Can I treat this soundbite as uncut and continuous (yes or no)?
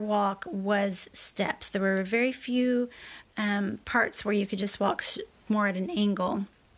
no